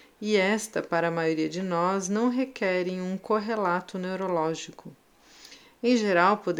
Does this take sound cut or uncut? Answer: uncut